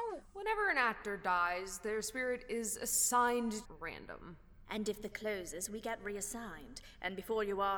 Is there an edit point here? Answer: yes; 2 cuts; at 3.6 s, 5.1 s

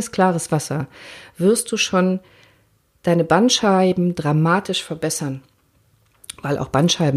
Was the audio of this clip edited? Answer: no; 0 cuts

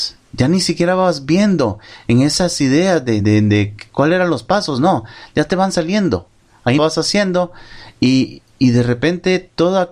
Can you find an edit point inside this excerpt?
yes; 2 cuts; at 3.2 s, 6.8 s

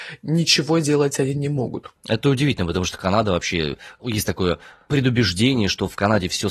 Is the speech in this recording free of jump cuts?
yes; 0 cuts

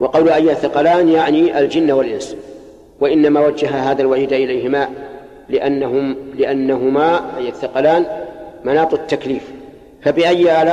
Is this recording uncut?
yes; 0 cuts

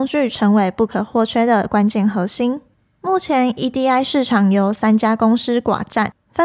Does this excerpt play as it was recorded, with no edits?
yes; 0 cuts

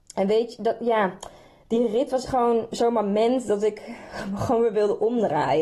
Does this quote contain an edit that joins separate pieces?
yes; 1 cut; at 2.3 s

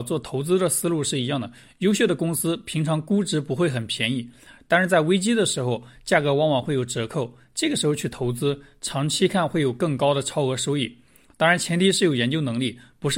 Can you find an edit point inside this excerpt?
no; 0 cuts

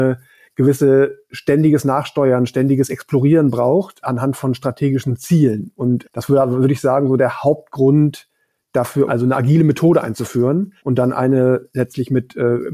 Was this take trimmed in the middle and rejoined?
yes; 4 cuts; at 4.0 s, 6.0 s, 9.1 s, 10.8 s

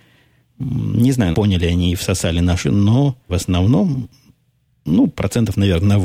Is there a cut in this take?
yes; 3 cuts; at 1.3 s, 2.6 s, 3.3 s

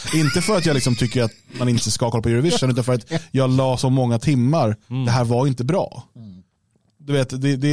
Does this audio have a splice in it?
yes; 1 cut; at 4.8 s

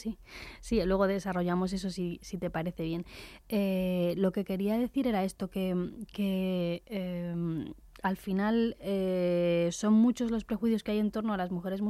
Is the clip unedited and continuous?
yes; 0 cuts

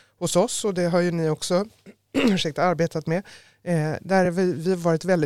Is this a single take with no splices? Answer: yes; 0 cuts

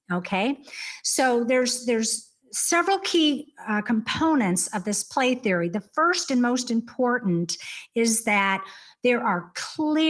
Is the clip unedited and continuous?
no; 1 cut; at 2.4 s

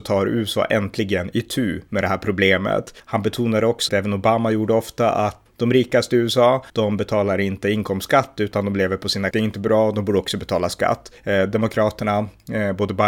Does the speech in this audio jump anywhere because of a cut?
yes; 6 cuts; at 3.0 s, 3.9 s, 5.5 s, 6.7 s, 9.3 s, 11.2 s

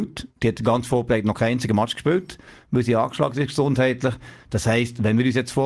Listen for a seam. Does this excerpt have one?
no; 0 cuts

